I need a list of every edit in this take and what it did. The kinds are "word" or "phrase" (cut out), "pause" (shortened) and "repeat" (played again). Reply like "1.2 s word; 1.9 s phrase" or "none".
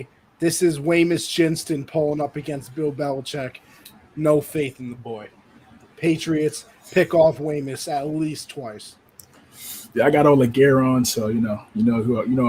none

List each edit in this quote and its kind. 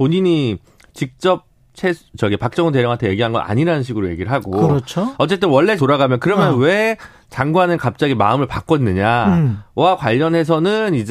5.8 s word

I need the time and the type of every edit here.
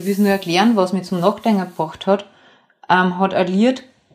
none

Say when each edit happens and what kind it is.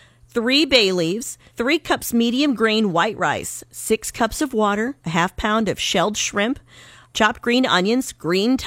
1.5 s pause; 5.0 s pause; 7.1 s phrase

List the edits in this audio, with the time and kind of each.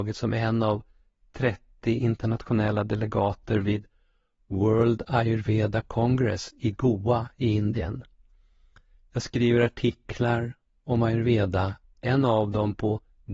none

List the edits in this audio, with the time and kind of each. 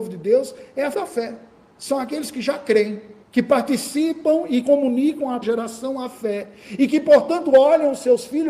0.9 s word; 3.2 s pause; 4.6 s word; 5.4 s word

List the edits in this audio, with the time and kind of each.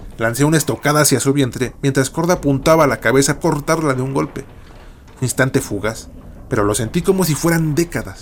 3.4 s phrase; 5.2 s word

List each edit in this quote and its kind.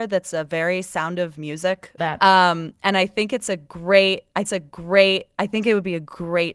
2.0 s phrase; 4.4 s repeat

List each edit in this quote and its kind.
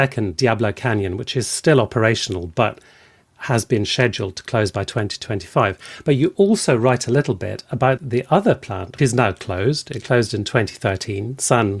8.0 s word; 9.0 s word

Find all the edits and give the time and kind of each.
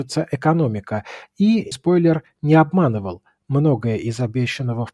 1.7 s word

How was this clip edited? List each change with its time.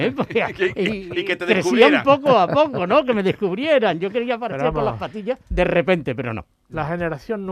5.4 s pause

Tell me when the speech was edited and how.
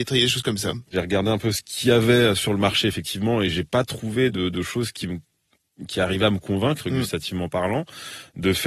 none

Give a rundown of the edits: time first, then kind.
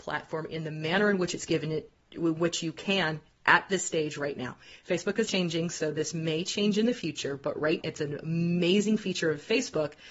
5.3 s word; 7.8 s word

